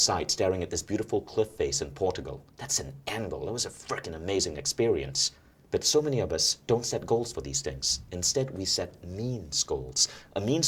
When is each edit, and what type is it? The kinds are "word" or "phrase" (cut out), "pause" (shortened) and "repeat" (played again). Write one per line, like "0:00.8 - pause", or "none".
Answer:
0:02.5 - pause
0:05.5 - pause
0:06.6 - pause